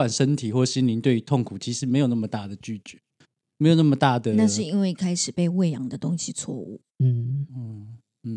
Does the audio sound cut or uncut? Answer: cut